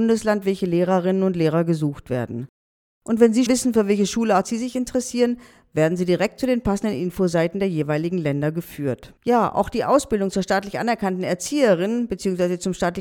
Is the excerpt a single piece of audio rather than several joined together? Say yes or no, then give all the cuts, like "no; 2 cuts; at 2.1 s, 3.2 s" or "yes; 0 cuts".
no; 2 cuts; at 3.5 s, 9.2 s